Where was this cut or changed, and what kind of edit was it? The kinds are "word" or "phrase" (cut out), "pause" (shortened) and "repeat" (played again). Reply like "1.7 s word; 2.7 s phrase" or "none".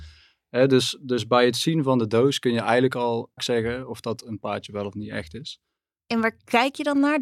3.4 s word